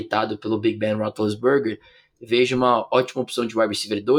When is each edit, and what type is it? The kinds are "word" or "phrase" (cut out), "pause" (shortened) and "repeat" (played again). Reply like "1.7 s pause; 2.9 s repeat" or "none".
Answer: none